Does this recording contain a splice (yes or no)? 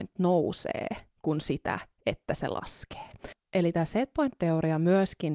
no